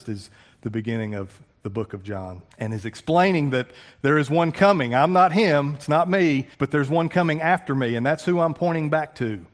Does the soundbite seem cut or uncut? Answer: cut